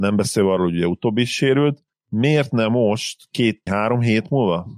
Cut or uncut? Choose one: cut